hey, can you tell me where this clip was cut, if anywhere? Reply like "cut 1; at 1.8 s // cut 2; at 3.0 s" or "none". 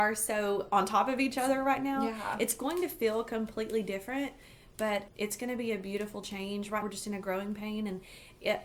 cut 1; at 5.1 s // cut 2; at 6.8 s